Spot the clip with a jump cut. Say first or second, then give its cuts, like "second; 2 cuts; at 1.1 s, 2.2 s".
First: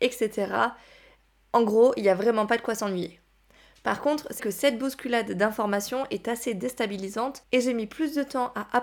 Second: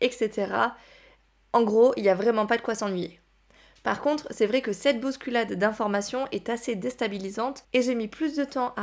first; 1 cut; at 4.4 s